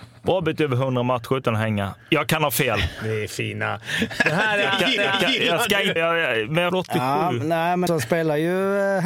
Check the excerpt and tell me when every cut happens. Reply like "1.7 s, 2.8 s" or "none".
5.0 s, 6.0 s, 6.7 s, 7.9 s